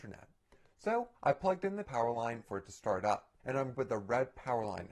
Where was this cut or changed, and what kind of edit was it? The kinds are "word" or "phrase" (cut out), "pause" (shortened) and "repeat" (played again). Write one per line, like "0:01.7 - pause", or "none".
0:01.1 - pause
0:01.8 - word
0:02.4 - phrase
0:03.4 - pause
0:03.7 - word